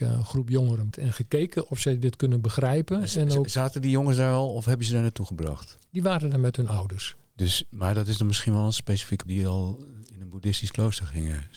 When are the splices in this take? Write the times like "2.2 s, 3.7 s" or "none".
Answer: 0.9 s, 5.9 s, 9.3 s

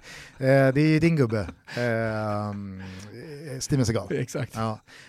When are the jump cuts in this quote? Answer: none

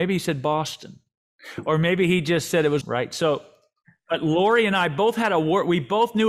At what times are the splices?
2.8 s

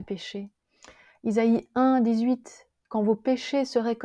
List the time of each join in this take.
none

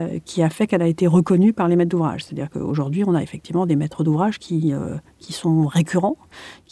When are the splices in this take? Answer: none

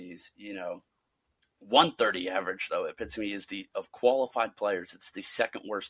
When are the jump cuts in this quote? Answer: none

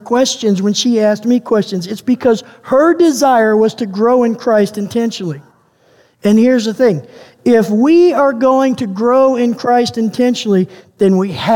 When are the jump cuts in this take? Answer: none

